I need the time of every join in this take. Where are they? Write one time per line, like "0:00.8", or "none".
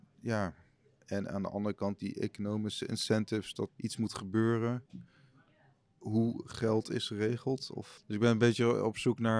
0:02.0
0:03.7